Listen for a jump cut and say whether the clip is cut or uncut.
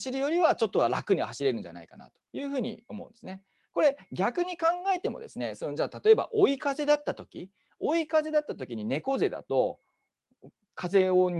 cut